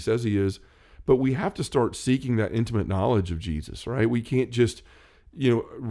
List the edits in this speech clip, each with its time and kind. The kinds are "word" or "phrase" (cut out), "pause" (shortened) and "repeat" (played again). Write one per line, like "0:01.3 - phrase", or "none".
none